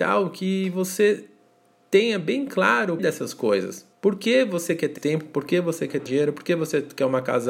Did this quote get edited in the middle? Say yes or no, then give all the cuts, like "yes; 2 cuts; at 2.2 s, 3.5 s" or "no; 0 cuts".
yes; 4 cuts; at 3.0 s, 3.9 s, 5.0 s, 6.1 s